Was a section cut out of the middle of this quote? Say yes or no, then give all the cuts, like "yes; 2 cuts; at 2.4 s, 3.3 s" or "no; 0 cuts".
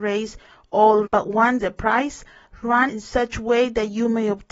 yes; 3 cuts; at 1.1 s, 1.6 s, 2.9 s